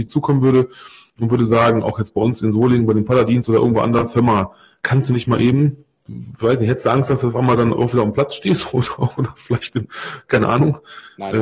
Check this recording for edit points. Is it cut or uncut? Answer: uncut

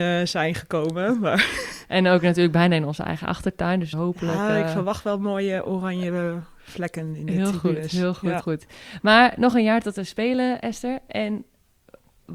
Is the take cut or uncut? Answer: cut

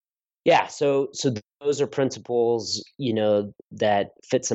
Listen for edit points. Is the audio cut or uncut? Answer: cut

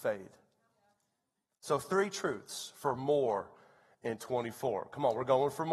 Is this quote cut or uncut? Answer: uncut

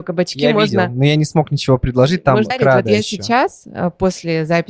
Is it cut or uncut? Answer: cut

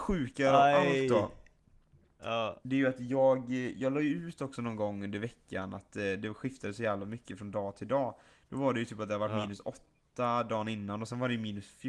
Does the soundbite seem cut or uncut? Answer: uncut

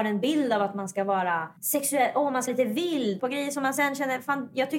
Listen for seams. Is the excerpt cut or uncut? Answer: cut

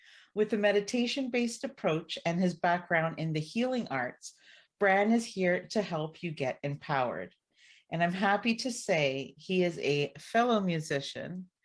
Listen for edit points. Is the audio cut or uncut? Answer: uncut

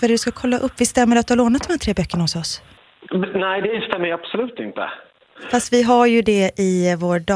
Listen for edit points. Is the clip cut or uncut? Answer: uncut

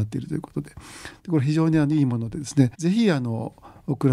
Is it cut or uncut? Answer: cut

